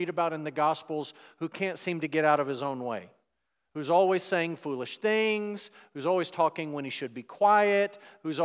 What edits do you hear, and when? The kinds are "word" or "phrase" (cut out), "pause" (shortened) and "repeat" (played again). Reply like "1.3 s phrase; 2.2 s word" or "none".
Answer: none

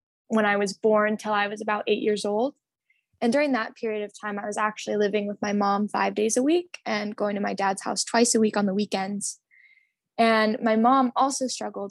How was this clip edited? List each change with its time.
none

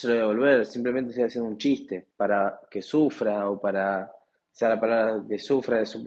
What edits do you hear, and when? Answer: 2.1 s pause

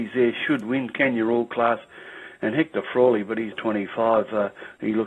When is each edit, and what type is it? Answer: 3.5 s phrase

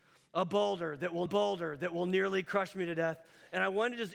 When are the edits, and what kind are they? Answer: 1.3 s repeat

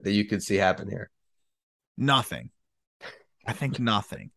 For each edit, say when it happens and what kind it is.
none

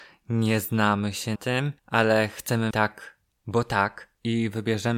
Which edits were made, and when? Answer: 1.3 s word; 1.8 s pause; 2.7 s word

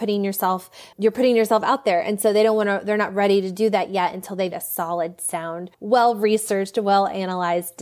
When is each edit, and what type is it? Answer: 0.9 s word; 4.5 s word; 5.7 s pause

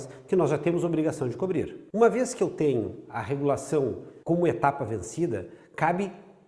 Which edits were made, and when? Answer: 4.2 s pause

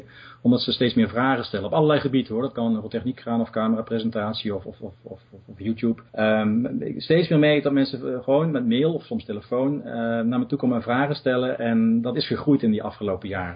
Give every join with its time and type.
6.1 s pause

